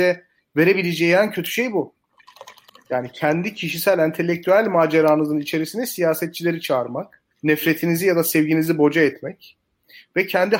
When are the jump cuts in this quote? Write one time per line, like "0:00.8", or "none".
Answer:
0:02.7
0:07.3